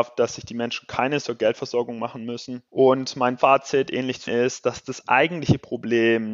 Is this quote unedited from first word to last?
no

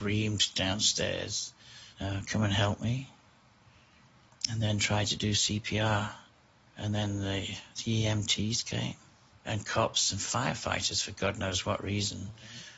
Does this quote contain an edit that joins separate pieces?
yes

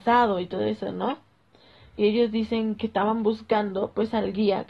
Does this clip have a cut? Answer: yes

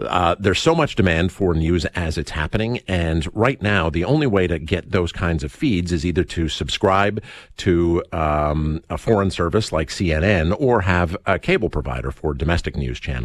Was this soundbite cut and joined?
no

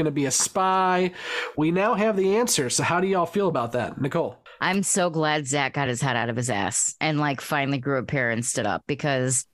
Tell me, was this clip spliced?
no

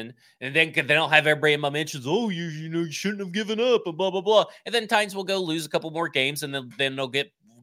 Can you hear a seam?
no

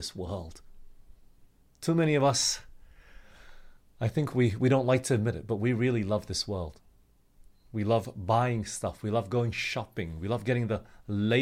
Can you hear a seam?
no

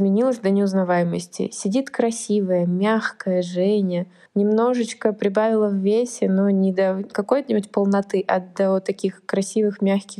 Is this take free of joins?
no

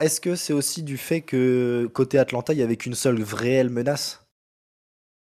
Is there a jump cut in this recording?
no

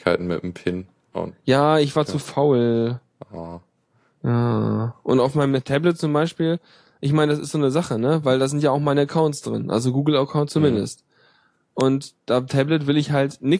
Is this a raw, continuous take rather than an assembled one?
yes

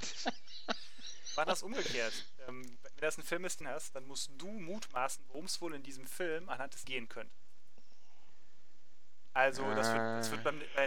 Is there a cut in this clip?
yes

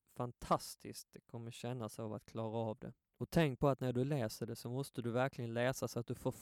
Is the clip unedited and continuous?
yes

